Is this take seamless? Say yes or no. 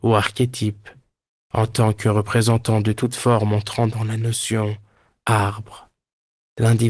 yes